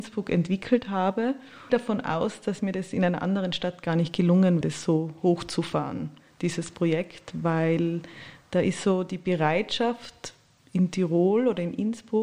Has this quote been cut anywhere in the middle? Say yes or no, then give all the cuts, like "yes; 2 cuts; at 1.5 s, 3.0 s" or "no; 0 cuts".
yes; 2 cuts; at 1.7 s, 4.6 s